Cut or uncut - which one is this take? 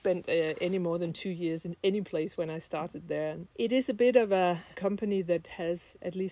cut